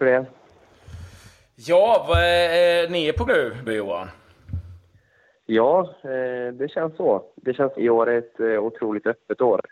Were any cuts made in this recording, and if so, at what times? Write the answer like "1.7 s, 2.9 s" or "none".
3.3 s, 3.7 s, 7.3 s, 7.8 s